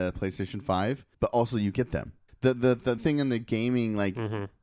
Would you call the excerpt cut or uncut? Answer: cut